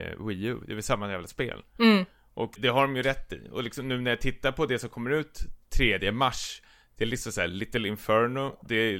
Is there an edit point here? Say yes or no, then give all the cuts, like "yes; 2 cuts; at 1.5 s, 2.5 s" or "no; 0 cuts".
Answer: yes; 1 cut; at 2.6 s